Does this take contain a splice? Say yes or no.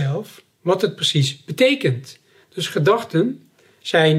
no